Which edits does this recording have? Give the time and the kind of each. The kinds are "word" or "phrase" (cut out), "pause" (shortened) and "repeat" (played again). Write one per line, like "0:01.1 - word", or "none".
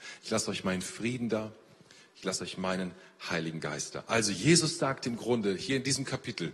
none